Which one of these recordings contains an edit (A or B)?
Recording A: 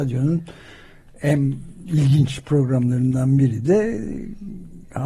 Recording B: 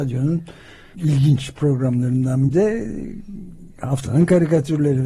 B